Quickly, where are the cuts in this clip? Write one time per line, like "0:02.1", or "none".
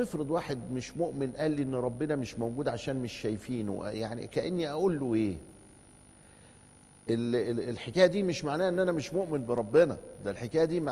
none